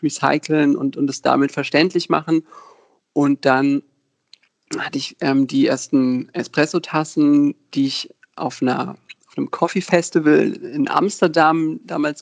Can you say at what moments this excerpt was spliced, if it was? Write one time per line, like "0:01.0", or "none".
none